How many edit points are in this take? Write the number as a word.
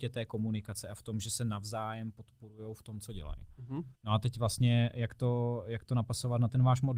one